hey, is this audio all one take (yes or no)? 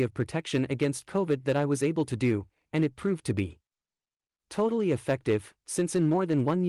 yes